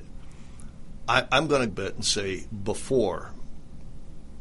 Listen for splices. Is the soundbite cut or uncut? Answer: cut